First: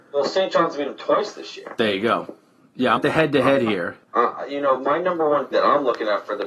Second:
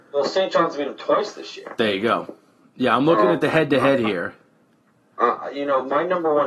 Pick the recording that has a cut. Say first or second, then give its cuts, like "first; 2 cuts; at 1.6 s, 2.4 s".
first; 3 cuts; at 3.0 s, 4.0 s, 5.5 s